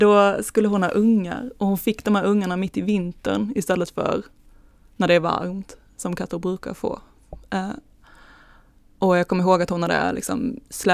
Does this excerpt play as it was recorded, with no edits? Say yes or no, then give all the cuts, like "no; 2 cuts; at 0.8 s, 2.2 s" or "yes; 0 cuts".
yes; 0 cuts